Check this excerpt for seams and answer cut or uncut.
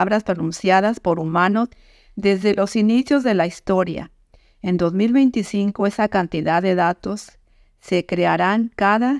uncut